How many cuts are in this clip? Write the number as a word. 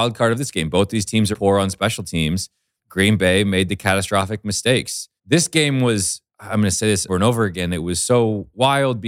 five